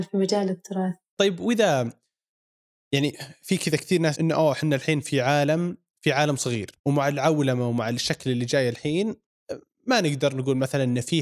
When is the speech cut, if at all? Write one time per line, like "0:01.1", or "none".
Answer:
0:04.1
0:06.8